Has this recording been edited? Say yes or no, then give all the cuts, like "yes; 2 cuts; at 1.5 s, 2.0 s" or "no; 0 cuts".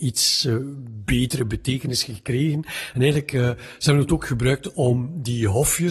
no; 0 cuts